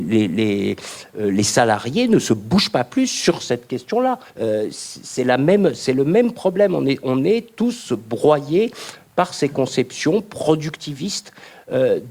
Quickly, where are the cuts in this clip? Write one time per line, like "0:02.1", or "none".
0:04.3